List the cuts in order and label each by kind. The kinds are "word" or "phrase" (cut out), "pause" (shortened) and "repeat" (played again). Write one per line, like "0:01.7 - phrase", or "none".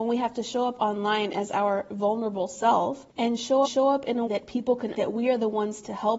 0:03.1 - pause
0:03.6 - repeat
0:04.3 - word
0:04.9 - phrase